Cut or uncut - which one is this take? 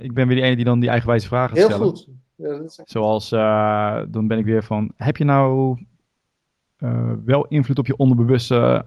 uncut